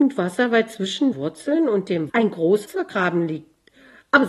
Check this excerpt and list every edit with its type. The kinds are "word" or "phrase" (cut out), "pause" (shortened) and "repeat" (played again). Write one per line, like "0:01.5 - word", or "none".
0:01.1 - word
0:02.1 - word
0:02.7 - word